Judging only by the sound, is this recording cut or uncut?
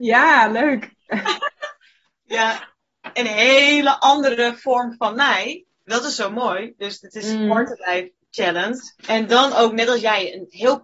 cut